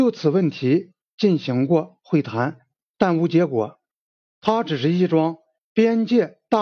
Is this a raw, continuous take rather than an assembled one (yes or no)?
yes